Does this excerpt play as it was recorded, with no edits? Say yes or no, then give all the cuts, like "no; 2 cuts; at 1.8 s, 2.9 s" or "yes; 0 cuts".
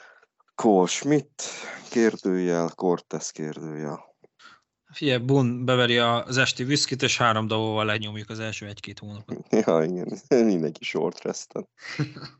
yes; 0 cuts